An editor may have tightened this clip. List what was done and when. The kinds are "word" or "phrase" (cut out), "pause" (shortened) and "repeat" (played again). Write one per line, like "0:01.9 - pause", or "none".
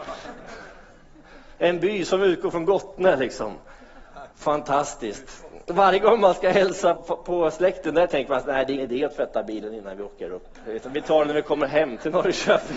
0:04.3 - pause
0:07.0 - word
0:08.8 - word